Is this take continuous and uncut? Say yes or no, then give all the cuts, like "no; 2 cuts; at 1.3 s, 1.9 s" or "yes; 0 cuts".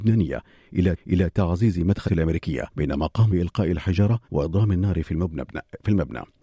no; 5 cuts; at 1.0 s, 2.1 s, 2.7 s, 3.3 s, 4.2 s